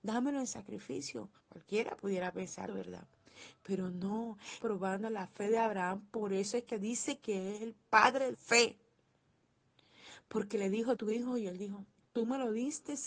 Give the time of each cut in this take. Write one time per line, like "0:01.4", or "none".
0:01.4
0:02.7
0:04.6
0:06.7
0:08.3
0:10.9